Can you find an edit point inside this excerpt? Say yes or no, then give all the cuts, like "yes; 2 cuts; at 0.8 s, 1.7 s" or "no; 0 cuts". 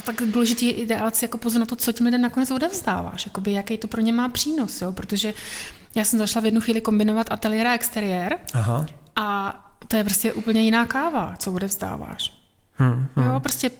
no; 0 cuts